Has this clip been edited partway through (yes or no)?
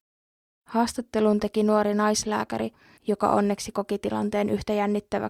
no